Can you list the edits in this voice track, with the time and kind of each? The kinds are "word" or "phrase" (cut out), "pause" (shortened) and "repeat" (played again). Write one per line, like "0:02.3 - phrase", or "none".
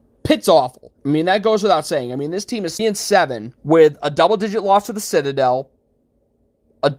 0:01.0 - pause
0:02.8 - word
0:03.6 - pause